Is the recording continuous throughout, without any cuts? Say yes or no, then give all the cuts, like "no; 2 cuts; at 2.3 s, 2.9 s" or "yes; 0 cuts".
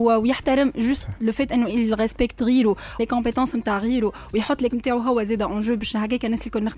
no; 2 cuts; at 3.0 s, 4.7 s